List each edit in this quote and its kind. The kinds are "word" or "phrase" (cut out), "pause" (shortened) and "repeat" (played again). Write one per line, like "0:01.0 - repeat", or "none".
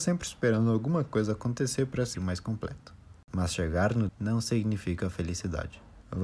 0:02.1 - word
0:04.1 - word